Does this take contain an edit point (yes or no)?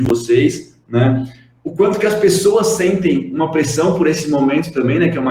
no